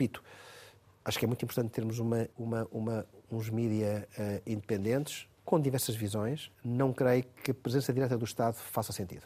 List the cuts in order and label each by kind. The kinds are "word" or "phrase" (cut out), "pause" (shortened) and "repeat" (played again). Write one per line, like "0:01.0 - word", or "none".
0:02.3 - pause
0:05.4 - pause
0:06.5 - pause